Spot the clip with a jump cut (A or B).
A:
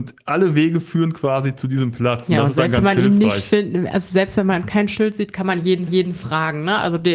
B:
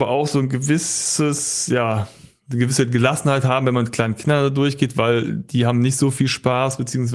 A